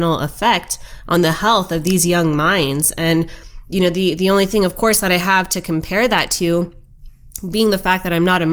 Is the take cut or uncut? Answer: uncut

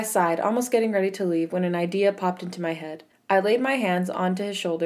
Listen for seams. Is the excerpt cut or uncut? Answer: cut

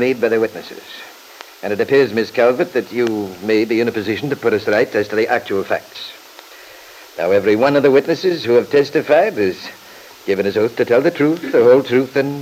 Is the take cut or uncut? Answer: uncut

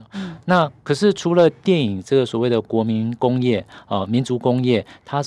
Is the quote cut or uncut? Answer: uncut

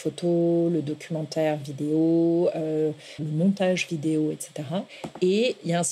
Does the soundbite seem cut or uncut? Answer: cut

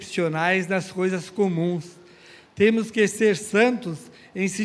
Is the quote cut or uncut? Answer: uncut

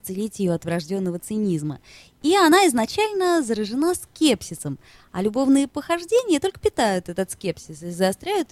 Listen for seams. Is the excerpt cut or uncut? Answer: uncut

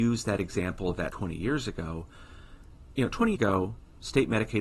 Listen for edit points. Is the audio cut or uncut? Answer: cut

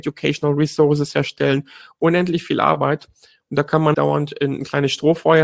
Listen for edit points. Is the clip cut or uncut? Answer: cut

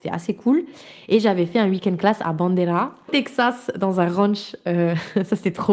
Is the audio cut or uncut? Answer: cut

